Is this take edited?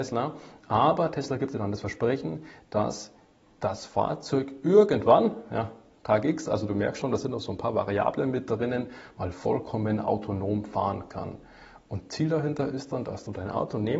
no; 0 cuts

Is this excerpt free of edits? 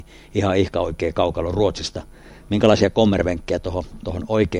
yes; 0 cuts

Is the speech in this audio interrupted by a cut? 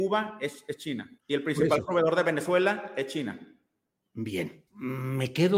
yes; 2 cuts; at 1.2 s, 4.7 s

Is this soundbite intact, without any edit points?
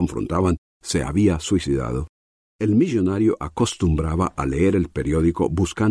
yes; 0 cuts

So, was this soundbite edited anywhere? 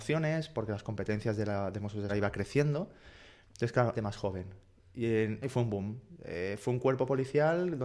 yes; 3 cuts; at 2.1 s, 3.9 s, 5.4 s

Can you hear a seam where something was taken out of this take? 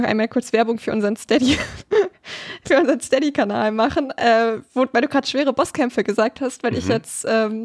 no; 0 cuts

